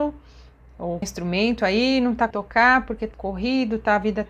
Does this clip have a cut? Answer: yes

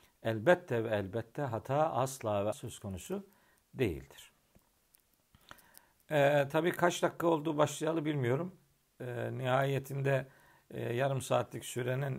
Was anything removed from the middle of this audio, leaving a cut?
yes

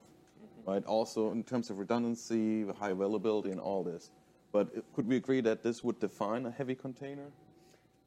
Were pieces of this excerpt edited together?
no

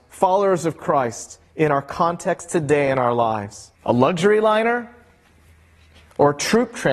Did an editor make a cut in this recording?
yes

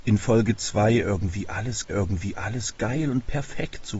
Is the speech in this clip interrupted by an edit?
yes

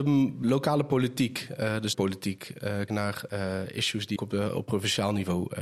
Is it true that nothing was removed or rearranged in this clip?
no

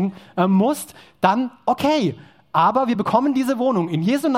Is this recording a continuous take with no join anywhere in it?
yes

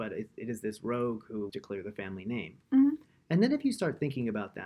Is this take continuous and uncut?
no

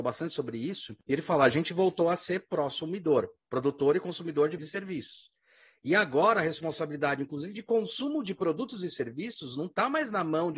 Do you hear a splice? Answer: yes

